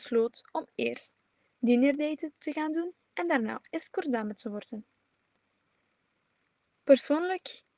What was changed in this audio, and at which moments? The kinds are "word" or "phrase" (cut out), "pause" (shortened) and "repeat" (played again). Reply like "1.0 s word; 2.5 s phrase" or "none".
none